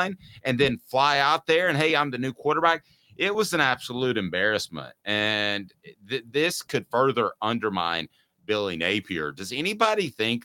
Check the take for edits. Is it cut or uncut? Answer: uncut